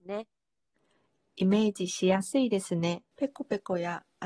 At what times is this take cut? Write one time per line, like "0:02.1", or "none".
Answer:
0:03.1